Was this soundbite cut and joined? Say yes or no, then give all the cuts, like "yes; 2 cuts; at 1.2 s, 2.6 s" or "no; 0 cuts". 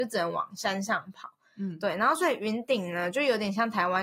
no; 0 cuts